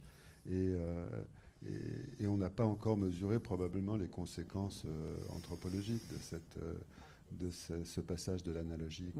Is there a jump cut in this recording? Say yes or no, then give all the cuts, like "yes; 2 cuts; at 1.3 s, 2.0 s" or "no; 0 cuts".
no; 0 cuts